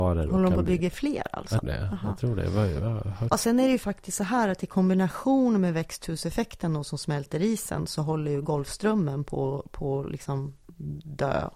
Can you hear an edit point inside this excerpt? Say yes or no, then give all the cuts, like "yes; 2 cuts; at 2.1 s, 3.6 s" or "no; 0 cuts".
yes; 2 cuts; at 1.6 s, 3.3 s